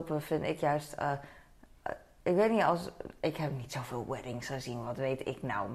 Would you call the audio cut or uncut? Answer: uncut